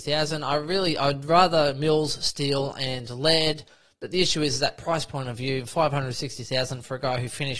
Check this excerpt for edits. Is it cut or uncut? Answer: uncut